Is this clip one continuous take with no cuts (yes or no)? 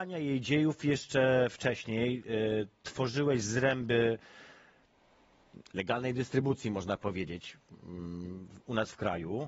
yes